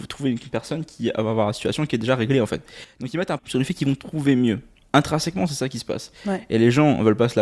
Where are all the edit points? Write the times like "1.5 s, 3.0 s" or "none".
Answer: 3.4 s